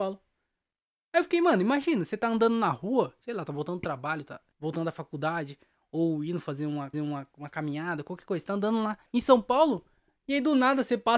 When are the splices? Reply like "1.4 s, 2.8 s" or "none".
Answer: 4.5 s, 6.9 s, 9.1 s